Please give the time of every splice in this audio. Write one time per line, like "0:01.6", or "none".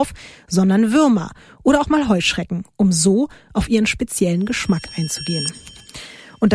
none